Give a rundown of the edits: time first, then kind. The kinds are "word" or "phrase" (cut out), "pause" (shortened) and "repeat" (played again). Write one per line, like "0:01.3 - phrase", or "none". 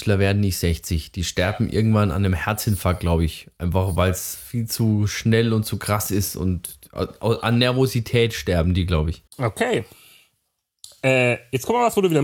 0:09.3 - pause